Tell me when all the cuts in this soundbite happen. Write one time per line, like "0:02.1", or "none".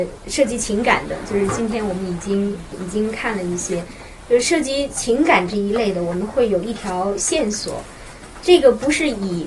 0:02.7